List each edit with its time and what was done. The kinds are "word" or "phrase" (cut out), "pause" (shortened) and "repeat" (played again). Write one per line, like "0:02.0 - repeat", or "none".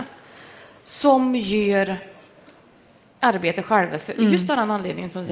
none